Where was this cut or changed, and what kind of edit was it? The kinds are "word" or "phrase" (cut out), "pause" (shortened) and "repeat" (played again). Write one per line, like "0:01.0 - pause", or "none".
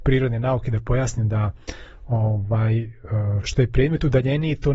0:03.4 - word

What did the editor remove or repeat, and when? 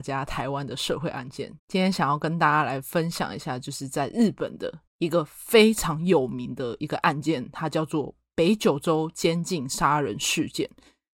0:01.6 - pause
0:04.9 - pause

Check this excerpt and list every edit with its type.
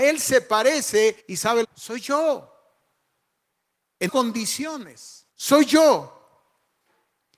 0:01.2 - pause
0:01.6 - phrase
0:04.1 - word
0:05.3 - pause

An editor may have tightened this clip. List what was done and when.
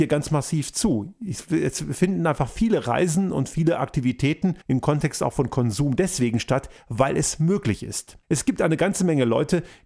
0:04.6 - pause
0:08.2 - pause

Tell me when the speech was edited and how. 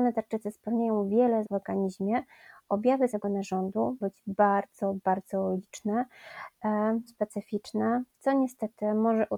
0:01.4 - word
0:03.1 - word
0:04.0 - word
0:07.1 - word

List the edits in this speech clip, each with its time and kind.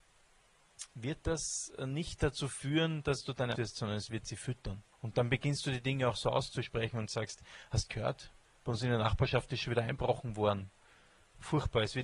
0:03.6 - phrase
0:04.9 - pause

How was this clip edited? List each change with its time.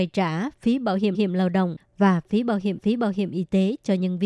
0:01.1 - repeat
0:02.8 - repeat

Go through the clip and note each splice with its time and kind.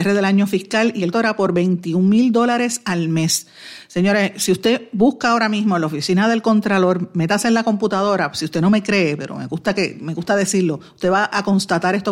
0:01.1 - word

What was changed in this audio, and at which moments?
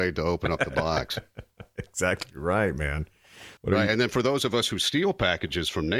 0:03.6 - pause

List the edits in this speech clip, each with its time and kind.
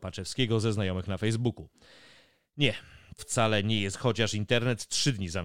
0:03.2 - word
0:03.9 - word

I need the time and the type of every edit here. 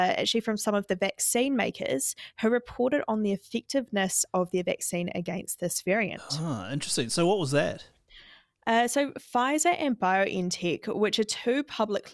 none

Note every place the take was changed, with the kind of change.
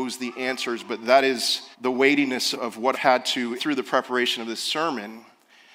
0:01.7 - pause
0:02.5 - word
0:02.9 - phrase
0:03.6 - phrase

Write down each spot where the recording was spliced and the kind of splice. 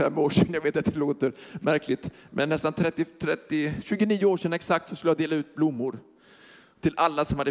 none

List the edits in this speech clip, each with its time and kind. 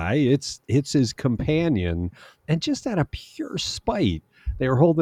none

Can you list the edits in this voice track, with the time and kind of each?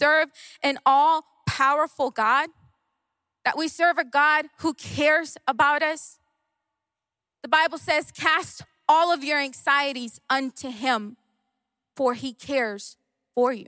none

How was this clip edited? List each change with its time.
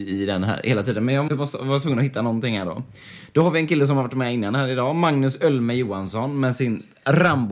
0:01.3 - word

